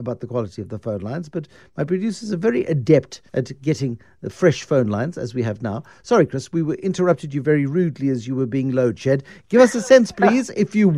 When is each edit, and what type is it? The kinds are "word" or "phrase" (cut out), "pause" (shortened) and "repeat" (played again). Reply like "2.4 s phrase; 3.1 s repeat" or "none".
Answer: 3.3 s pause